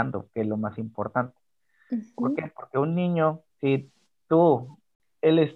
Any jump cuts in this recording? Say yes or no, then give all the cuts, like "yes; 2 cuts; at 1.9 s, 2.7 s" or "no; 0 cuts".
yes; 1 cut; at 3.5 s